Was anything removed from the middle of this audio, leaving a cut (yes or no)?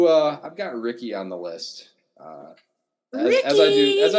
no